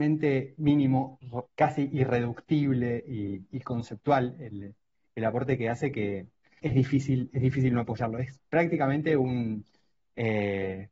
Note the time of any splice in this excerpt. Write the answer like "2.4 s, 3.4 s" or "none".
1.5 s, 6.6 s